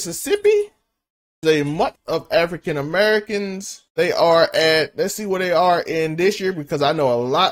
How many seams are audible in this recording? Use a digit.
3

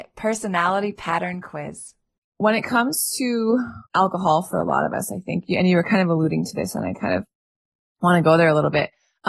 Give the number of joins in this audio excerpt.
2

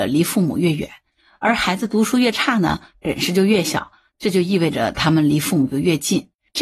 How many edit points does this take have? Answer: 0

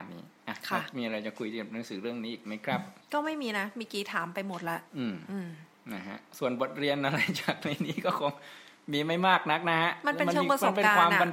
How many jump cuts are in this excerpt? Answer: 2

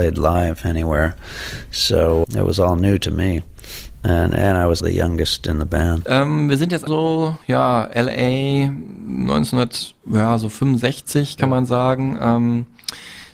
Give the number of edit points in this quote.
5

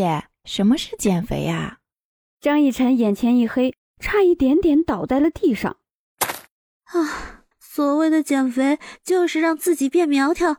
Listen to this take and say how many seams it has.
1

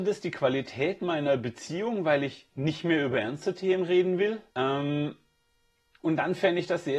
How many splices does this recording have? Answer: 1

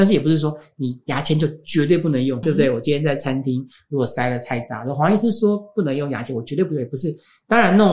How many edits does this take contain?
1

